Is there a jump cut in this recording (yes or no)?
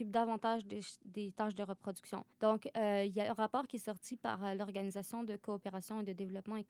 yes